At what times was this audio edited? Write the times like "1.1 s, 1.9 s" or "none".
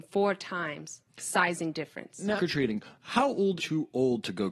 1.1 s, 2.4 s, 3.6 s